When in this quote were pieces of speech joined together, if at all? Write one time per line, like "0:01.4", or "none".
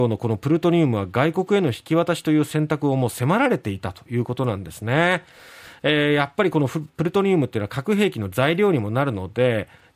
none